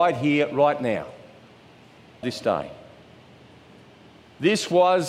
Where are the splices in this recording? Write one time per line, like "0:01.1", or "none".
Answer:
0:02.2